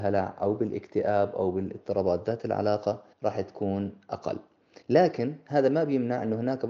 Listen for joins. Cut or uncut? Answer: cut